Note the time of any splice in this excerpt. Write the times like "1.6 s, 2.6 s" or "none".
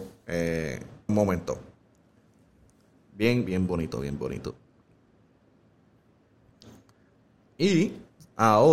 1.1 s, 3.5 s